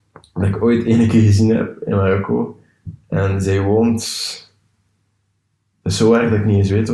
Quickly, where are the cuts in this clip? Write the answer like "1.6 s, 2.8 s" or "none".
none

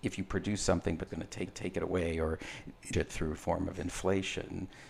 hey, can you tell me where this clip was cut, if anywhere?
1.1 s, 1.5 s, 2.9 s, 3.4 s

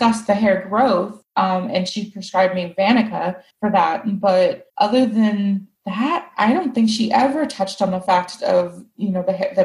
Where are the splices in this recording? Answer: 3.5 s, 4.7 s, 5.7 s

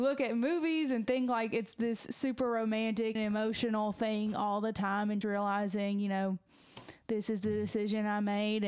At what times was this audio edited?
3.1 s, 5.2 s

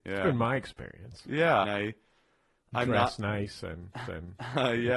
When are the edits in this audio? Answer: 1.6 s, 4.0 s

